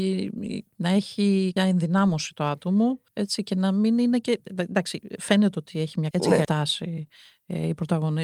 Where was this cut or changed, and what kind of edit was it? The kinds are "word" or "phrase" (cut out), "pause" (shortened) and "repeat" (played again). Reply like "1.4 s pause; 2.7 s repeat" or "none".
1.6 s word; 3.1 s pause; 6.1 s word; 6.4 s word